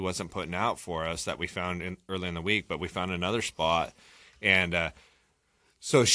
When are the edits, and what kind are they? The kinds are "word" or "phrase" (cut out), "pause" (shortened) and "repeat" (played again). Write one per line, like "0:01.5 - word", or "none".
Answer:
none